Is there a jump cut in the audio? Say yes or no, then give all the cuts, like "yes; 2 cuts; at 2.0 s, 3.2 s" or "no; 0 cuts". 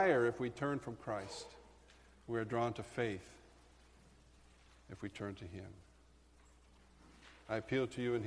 no; 0 cuts